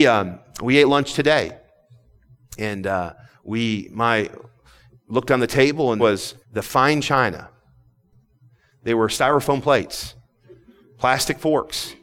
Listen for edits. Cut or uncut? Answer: cut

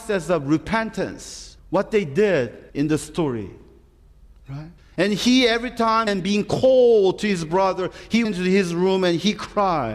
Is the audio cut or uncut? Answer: cut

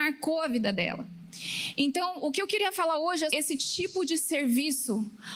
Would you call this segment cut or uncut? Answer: cut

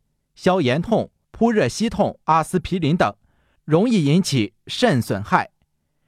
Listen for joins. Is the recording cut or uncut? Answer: cut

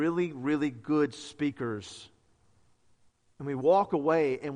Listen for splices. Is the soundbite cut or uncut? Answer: uncut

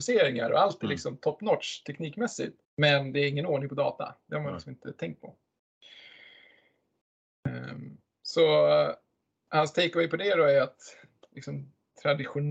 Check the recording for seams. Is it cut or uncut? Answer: cut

